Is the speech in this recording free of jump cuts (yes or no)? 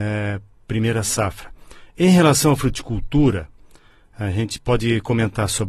yes